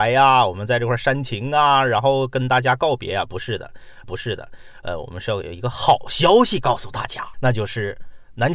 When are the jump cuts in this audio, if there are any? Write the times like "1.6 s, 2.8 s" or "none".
4.0 s, 7.3 s